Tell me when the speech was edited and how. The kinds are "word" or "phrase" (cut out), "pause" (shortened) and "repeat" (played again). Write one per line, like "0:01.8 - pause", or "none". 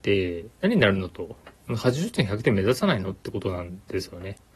0:01.5 - pause